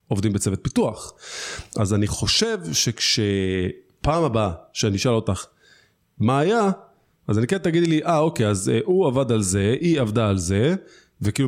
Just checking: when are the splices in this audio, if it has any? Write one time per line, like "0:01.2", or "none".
none